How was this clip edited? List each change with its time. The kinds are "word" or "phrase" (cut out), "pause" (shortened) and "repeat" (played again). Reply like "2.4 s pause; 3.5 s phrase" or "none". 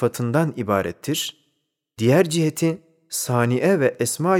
none